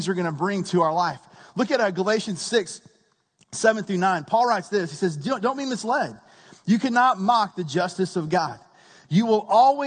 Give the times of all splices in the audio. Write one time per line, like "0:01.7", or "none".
none